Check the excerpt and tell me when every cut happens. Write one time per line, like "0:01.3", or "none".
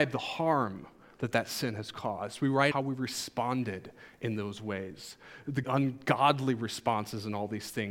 0:02.7
0:05.6